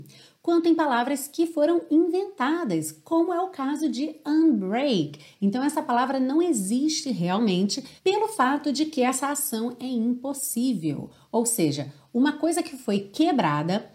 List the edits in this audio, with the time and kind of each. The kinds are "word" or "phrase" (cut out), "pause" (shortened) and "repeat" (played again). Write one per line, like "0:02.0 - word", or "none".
0:08.0 - pause